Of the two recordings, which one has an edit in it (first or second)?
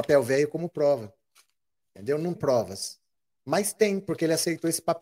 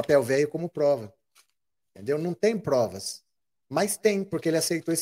first